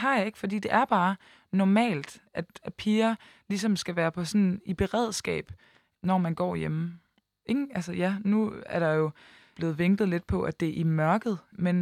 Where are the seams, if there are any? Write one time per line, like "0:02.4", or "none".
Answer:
0:02.3